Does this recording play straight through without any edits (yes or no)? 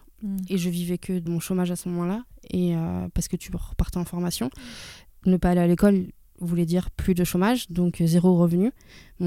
no